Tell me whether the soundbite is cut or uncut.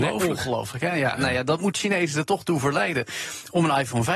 uncut